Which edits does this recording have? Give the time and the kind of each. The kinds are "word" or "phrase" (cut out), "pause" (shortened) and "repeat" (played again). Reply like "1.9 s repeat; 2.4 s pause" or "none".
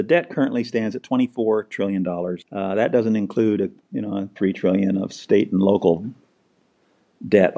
2.4 s pause; 4.4 s word